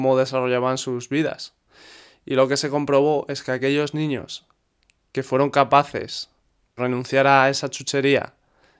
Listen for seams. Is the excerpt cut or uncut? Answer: cut